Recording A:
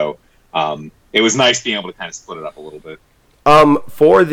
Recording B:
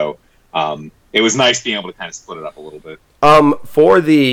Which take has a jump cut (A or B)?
B